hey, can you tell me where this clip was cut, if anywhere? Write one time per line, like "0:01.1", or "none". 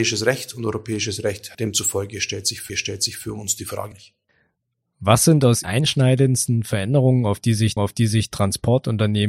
0:01.5
0:02.7
0:03.9
0:05.6
0:07.8